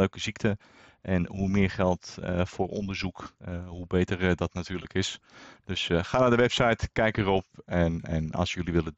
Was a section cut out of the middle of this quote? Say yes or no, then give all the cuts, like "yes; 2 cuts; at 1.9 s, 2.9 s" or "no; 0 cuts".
no; 0 cuts